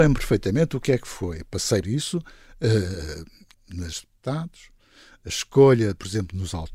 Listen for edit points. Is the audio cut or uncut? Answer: cut